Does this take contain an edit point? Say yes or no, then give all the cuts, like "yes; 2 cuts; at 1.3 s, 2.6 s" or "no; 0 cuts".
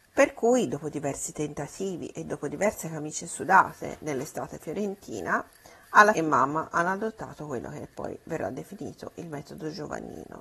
yes; 1 cut; at 6.1 s